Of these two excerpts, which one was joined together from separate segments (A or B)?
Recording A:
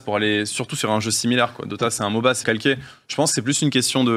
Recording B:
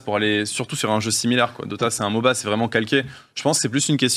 A